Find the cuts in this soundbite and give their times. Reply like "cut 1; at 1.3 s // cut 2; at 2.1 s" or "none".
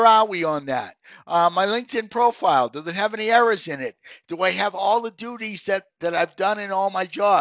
cut 1; at 5.9 s